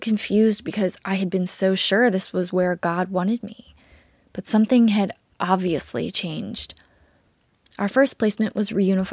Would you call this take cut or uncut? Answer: uncut